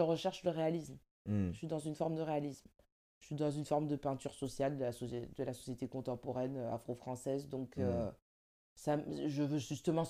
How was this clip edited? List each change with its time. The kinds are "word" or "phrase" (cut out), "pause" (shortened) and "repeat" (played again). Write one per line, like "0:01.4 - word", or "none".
none